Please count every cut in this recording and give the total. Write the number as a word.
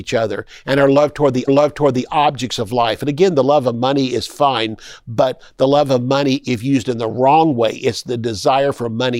one